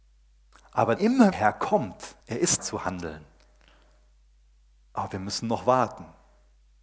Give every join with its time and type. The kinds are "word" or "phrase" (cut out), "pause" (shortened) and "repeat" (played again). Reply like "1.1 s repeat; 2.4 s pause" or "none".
1.0 s word; 1.3 s phrase; 2.2 s pause; 2.6 s word

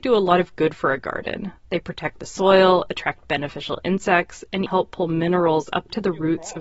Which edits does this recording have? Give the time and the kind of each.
4.7 s word

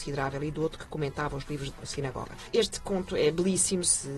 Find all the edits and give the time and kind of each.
none

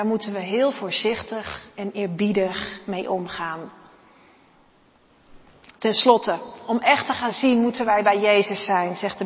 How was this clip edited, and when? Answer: 1.7 s pause

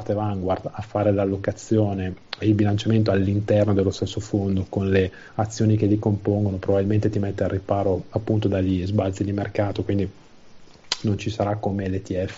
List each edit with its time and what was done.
2.4 s word; 5.3 s pause

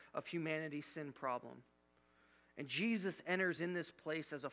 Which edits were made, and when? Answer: none

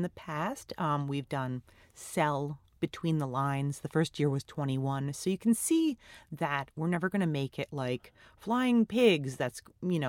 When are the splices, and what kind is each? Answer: none

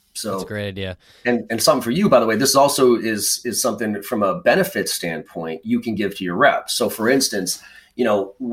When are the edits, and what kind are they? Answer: none

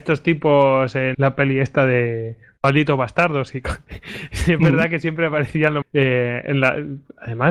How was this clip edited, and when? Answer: 1.1 s word; 5.8 s word

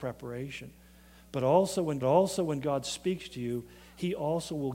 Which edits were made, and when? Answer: 2.0 s repeat

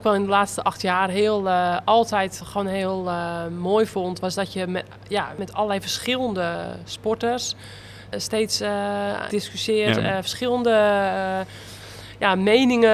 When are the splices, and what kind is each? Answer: 9.3 s phrase

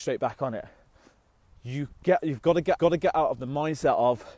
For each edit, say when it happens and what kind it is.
2.8 s repeat

